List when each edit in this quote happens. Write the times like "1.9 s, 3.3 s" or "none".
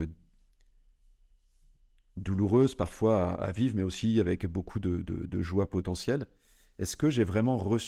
none